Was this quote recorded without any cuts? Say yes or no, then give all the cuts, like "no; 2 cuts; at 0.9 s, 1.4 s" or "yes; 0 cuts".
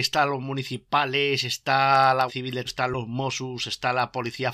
no; 2 cuts; at 2.3 s, 2.7 s